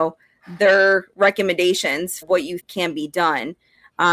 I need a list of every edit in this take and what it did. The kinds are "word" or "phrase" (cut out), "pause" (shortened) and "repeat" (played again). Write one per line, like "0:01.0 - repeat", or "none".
0:02.2 - word
0:02.6 - word